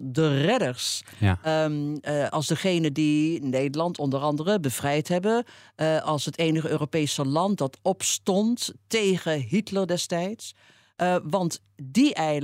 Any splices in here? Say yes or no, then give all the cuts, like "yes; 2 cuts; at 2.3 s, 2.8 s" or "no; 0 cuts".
no; 0 cuts